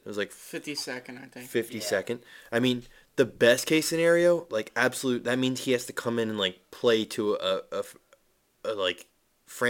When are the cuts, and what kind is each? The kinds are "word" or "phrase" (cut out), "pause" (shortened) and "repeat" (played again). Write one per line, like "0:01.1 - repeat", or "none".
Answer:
none